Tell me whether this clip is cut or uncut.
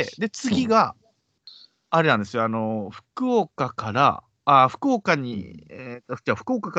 uncut